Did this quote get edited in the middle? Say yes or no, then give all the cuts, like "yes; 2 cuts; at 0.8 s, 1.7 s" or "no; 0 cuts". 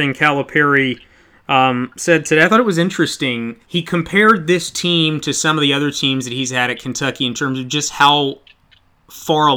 yes; 1 cut; at 3.6 s